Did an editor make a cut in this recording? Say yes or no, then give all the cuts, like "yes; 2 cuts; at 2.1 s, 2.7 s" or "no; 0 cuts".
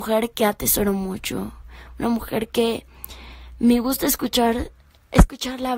no; 0 cuts